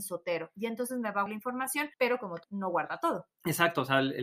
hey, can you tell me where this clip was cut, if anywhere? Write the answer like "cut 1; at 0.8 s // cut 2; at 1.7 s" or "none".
cut 1; at 1.3 s // cut 2; at 1.9 s // cut 3; at 2.4 s